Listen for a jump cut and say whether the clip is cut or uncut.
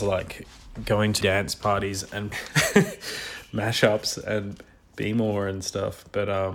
cut